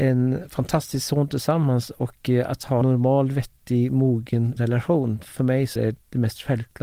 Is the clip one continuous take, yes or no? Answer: no